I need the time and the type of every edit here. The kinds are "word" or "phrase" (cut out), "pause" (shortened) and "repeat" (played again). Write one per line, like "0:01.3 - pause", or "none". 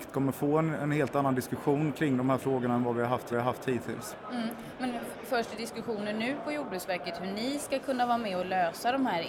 0:03.3 - repeat